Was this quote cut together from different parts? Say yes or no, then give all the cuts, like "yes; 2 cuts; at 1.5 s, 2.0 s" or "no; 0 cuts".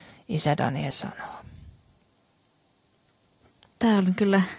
yes; 1 cut; at 0.9 s